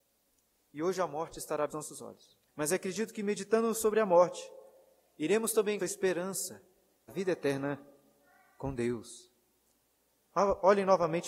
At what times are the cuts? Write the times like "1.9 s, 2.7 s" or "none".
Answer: 1.7 s, 2.5 s, 5.8 s, 7.1 s